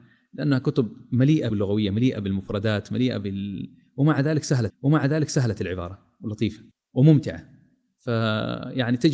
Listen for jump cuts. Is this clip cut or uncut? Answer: cut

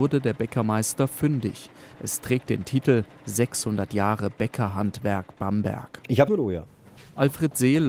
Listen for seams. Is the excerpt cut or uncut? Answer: cut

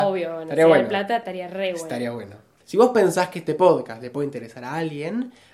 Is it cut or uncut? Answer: uncut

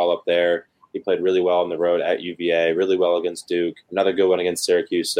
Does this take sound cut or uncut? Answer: cut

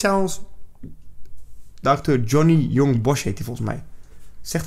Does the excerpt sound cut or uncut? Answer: uncut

